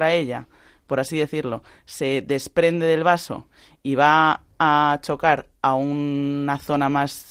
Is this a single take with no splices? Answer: yes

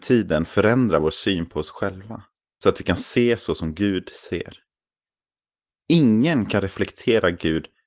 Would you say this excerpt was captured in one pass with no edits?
yes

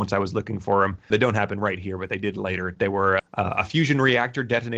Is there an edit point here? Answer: yes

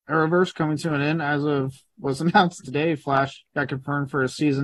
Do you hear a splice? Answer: yes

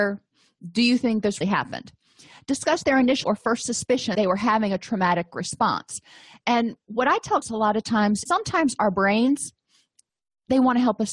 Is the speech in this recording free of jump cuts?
no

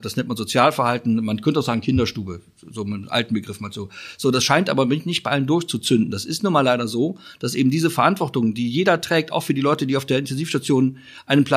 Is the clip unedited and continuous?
yes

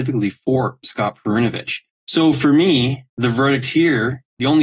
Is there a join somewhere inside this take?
yes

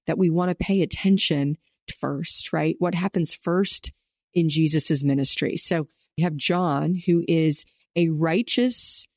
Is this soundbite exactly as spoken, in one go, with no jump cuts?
no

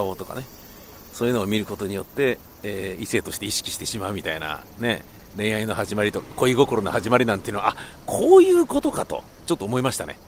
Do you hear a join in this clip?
no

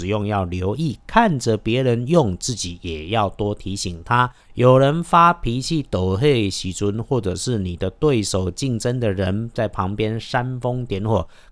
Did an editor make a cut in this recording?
yes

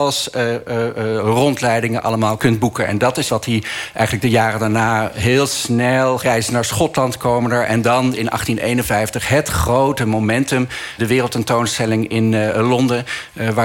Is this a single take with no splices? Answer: no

